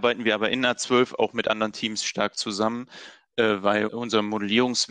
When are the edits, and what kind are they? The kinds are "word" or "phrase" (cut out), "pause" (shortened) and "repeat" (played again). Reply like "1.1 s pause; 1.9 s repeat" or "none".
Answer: none